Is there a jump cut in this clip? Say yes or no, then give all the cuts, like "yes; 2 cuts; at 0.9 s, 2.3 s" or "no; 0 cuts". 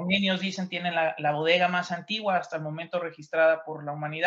no; 0 cuts